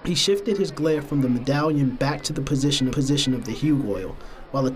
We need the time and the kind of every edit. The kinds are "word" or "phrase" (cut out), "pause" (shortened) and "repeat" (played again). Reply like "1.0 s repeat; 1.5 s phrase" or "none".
2.9 s repeat